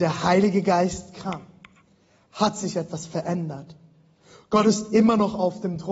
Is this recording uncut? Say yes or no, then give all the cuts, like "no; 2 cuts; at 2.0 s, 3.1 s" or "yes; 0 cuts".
yes; 0 cuts